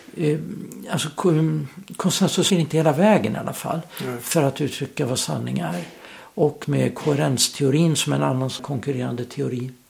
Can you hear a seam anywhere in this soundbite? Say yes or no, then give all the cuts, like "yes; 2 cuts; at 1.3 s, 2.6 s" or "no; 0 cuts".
yes; 3 cuts; at 2.5 s, 6.6 s, 8.6 s